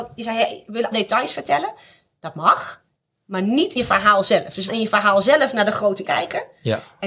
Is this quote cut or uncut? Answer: cut